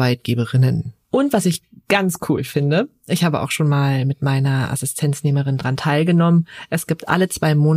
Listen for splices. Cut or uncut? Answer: uncut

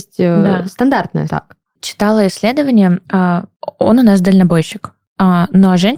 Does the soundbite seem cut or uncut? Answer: cut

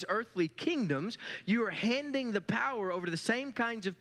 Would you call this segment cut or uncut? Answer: uncut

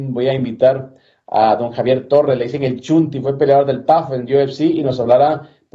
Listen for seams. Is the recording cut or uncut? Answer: uncut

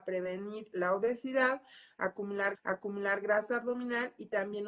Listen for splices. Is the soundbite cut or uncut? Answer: cut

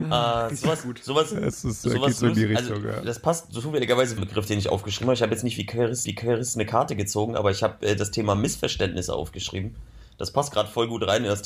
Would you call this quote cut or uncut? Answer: cut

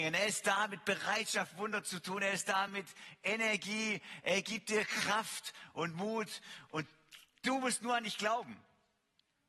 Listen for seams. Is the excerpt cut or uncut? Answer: uncut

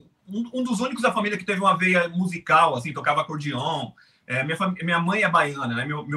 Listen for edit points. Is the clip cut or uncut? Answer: uncut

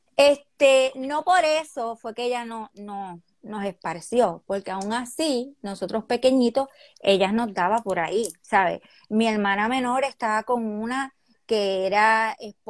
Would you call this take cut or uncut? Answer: uncut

